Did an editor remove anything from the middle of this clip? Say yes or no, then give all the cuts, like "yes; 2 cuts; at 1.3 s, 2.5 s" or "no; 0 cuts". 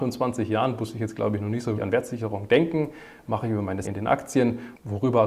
yes; 2 cuts; at 1.8 s, 3.8 s